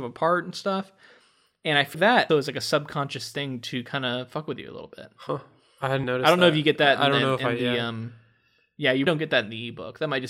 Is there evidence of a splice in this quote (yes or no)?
yes